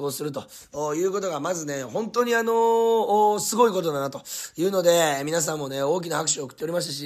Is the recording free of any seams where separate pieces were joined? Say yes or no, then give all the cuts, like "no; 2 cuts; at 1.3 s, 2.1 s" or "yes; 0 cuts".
yes; 0 cuts